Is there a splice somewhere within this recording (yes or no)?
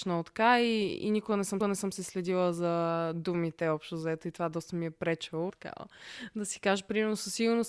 yes